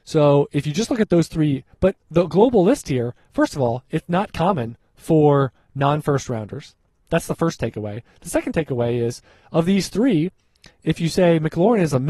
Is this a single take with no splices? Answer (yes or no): yes